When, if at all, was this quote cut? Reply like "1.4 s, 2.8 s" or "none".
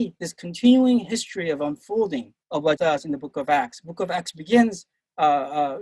2.4 s, 2.8 s